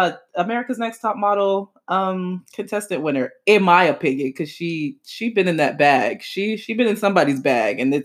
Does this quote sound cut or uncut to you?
uncut